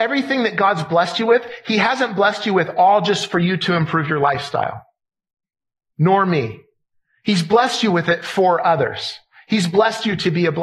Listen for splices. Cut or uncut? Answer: uncut